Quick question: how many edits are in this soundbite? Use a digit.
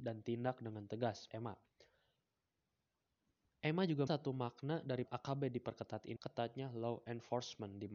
4